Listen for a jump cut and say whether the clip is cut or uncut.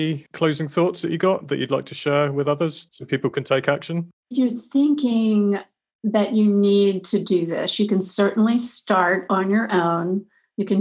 uncut